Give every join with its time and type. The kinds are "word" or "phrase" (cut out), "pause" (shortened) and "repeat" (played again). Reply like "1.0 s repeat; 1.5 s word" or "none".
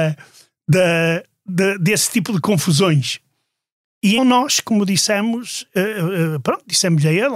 4.2 s word